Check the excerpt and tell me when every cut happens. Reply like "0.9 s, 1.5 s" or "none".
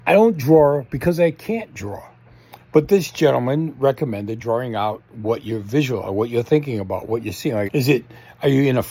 4.4 s, 7.7 s